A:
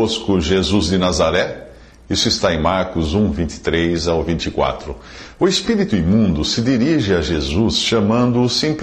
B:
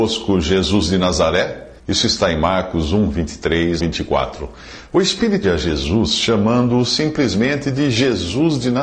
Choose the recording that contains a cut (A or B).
B